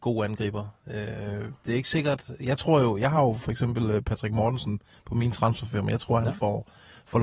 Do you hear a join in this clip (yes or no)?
no